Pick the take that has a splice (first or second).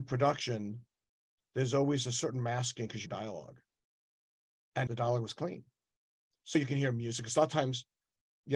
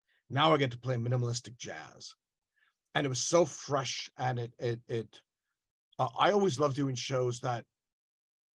first